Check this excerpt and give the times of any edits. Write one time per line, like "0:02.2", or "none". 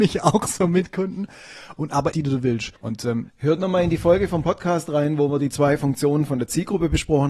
0:02.1
0:02.8